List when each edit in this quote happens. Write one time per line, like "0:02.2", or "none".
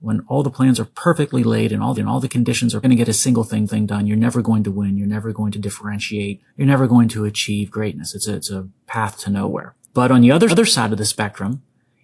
0:01.9
0:02.8
0:03.7
0:06.5
0:09.8
0:10.5